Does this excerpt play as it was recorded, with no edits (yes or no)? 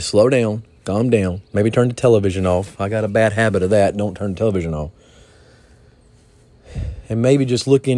no